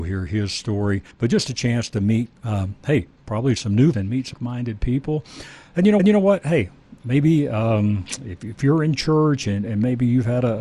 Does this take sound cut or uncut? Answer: cut